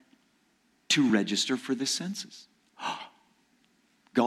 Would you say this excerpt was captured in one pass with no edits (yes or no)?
yes